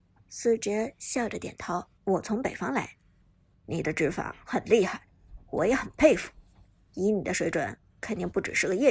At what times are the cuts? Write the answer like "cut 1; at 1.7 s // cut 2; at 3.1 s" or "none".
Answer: cut 1; at 1.9 s // cut 2; at 3.5 s

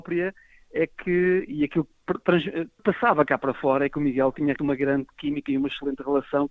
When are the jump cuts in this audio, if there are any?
cut 1; at 2.8 s // cut 2; at 4.6 s

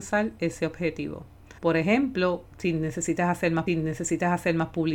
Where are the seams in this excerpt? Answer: cut 1; at 1.6 s // cut 2; at 2.4 s // cut 3; at 3.7 s

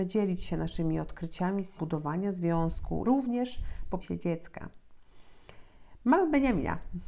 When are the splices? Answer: cut 1; at 1.8 s // cut 2; at 3.0 s // cut 3; at 4.0 s

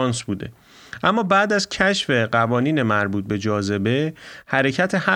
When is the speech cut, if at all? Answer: none

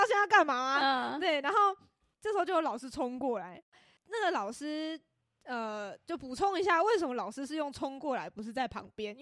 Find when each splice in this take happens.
none

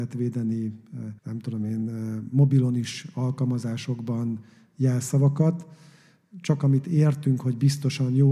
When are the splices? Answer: cut 1; at 1.2 s

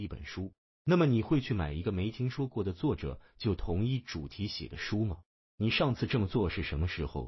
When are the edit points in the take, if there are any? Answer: none

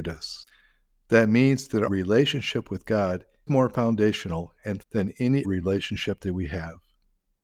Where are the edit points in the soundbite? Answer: cut 1; at 1.9 s // cut 2; at 3.5 s // cut 3; at 4.8 s // cut 4; at 5.4 s

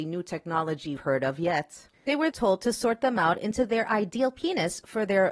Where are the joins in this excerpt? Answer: cut 1; at 1.0 s // cut 2; at 2.0 s // cut 3; at 2.3 s

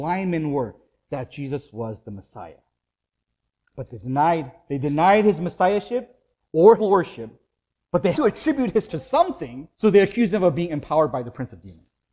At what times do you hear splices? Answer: cut 1; at 3.0 s // cut 2; at 6.8 s // cut 3; at 7.7 s // cut 4; at 8.1 s // cut 5; at 8.9 s // cut 6; at 9.7 s

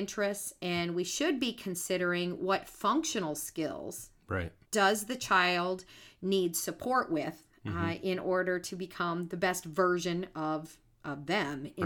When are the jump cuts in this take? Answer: cut 1; at 4.6 s

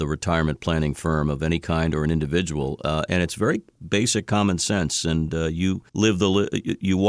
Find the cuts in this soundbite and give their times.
cut 1; at 5.9 s

